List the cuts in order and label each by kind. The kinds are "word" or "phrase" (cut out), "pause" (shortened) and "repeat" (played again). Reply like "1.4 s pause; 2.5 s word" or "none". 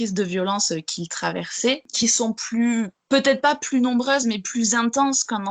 none